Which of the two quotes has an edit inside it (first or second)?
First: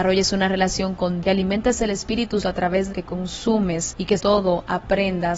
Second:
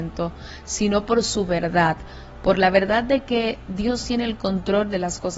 first